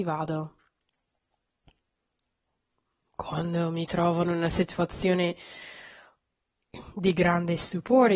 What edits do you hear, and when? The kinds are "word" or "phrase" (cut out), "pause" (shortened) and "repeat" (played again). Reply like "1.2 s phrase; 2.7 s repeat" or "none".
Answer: none